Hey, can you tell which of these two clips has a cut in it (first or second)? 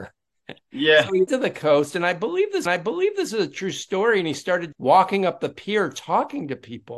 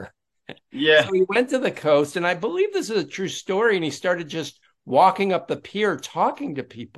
first